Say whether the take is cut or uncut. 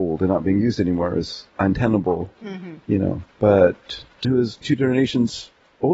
cut